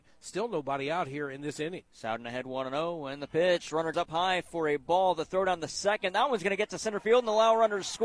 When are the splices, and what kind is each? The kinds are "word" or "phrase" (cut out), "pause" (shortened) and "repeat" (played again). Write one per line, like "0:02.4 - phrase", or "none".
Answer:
0:01.9 - pause
0:03.9 - word